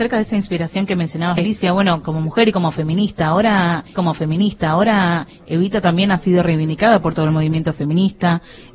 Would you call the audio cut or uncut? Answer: cut